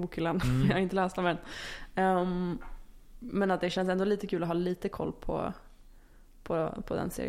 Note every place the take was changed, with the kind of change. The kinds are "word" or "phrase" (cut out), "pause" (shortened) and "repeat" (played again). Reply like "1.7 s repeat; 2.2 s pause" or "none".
none